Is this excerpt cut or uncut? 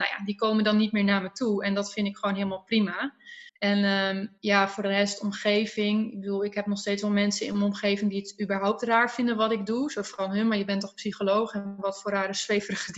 cut